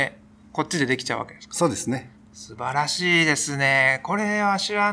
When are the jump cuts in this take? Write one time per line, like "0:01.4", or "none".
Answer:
0:02.1